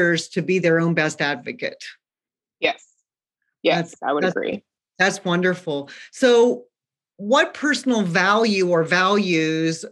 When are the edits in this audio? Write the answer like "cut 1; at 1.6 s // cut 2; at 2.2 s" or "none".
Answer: none